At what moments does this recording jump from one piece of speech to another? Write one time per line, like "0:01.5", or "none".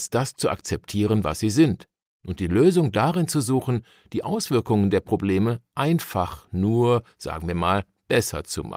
none

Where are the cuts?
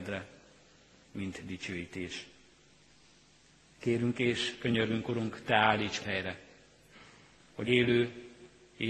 0:06.0
0:07.6

